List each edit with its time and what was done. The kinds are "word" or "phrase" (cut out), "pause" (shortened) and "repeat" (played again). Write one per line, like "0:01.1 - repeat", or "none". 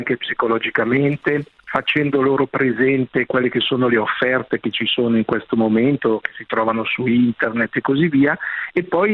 none